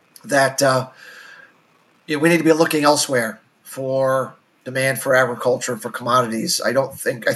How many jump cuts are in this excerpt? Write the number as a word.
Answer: zero